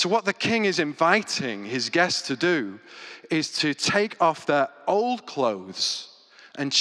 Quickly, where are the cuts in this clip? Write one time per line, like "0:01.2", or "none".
none